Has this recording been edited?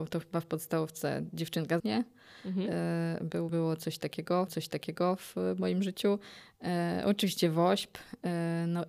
yes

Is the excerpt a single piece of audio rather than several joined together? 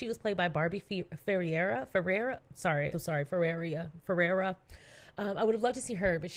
no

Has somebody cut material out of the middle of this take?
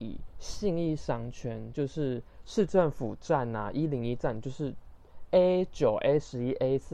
no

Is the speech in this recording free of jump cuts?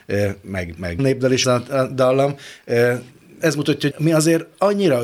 no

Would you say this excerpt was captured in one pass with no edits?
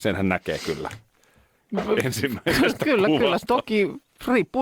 yes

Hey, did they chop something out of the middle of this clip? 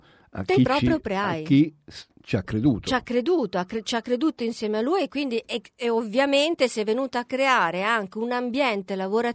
no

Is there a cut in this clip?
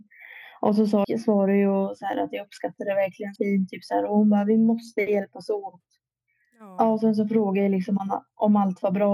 yes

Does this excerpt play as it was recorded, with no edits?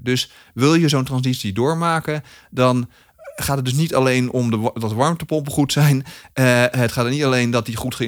yes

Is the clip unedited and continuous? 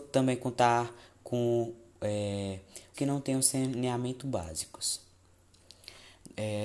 no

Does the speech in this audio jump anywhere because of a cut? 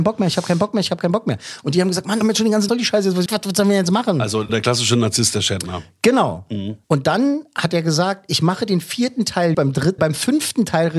yes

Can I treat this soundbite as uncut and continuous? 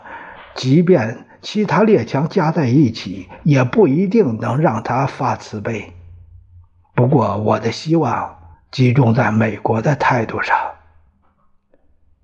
no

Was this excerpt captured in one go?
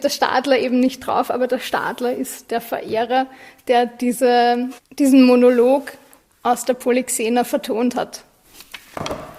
no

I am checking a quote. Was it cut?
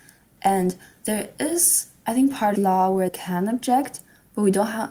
yes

